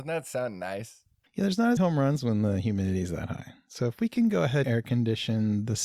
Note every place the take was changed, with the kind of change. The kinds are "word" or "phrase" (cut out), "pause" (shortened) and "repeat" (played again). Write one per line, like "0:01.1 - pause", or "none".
0:01.3 - pause
0:01.8 - word
0:04.6 - word

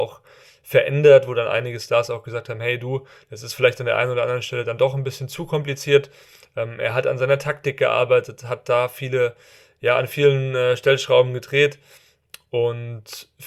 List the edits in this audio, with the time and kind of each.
none

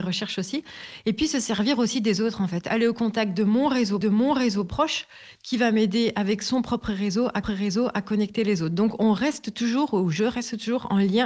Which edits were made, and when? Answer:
0:04.0 - repeat
0:07.4 - repeat

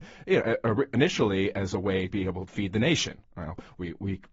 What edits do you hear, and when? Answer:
0:02.1 - word
0:02.5 - word

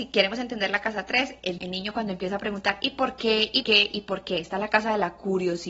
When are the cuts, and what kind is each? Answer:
0:01.6 - word
0:03.6 - word

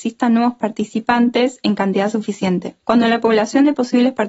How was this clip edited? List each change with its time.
none

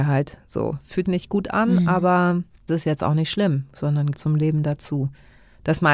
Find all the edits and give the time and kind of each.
0:01.0 - word
0:02.7 - word
0:04.1 - word

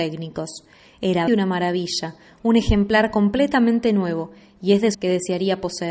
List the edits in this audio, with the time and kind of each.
0:01.3 - word
0:04.9 - word

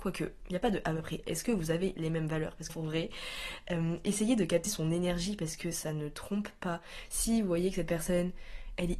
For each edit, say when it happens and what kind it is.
0:02.7 - phrase
0:04.7 - word

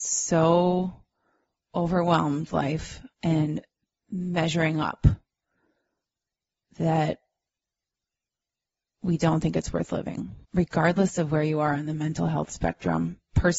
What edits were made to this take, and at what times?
0:02.5 - word
0:03.1 - pause
0:10.4 - pause

